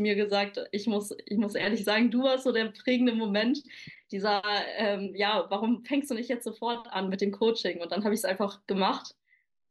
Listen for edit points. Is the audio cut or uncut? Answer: uncut